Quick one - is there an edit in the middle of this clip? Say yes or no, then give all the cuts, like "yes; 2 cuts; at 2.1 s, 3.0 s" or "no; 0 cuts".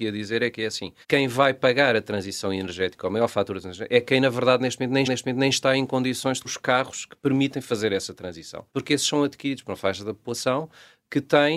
yes; 4 cuts; at 1.0 s, 5.0 s, 6.4 s, 8.7 s